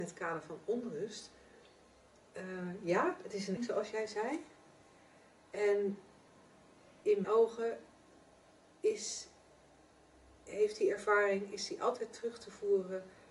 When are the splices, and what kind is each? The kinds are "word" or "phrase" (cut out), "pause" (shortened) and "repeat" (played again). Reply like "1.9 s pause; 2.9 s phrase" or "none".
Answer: 3.6 s word; 7.2 s word